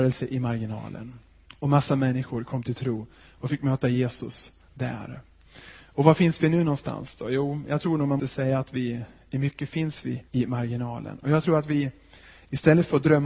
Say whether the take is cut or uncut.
cut